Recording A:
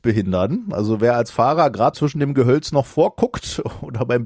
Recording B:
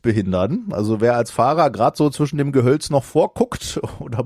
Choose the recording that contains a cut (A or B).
A